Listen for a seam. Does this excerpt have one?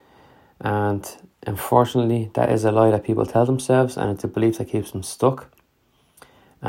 no; 0 cuts

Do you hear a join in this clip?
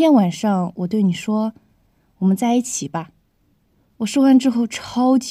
no; 0 cuts

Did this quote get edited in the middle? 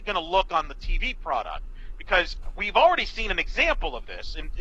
no; 0 cuts

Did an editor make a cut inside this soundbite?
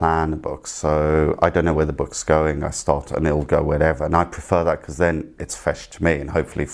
no; 0 cuts

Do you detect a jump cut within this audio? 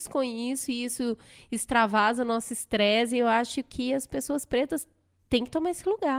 no; 0 cuts

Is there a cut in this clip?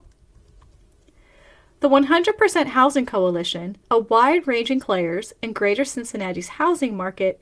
yes; 2 cuts; at 3.8 s, 4.8 s

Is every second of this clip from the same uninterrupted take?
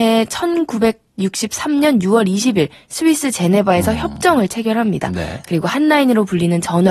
yes; 0 cuts

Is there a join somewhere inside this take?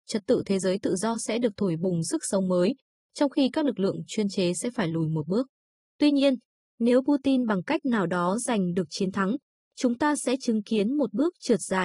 no; 0 cuts

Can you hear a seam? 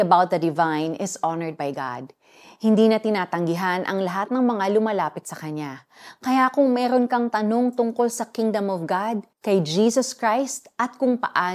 yes; 1 cut; at 9.3 s

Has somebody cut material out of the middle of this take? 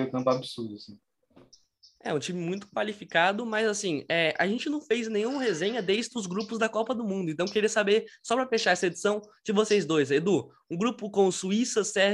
no; 0 cuts

